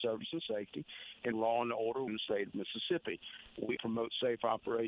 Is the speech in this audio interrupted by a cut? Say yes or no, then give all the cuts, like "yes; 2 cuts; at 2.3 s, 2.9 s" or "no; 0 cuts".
yes; 3 cuts; at 1.3 s, 2.1 s, 3.8 s